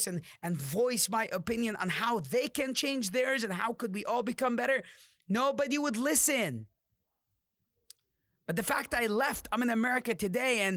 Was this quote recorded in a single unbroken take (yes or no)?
yes